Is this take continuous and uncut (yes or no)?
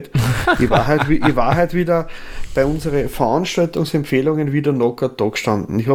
yes